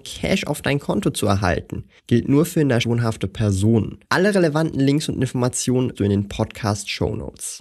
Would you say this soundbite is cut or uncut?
cut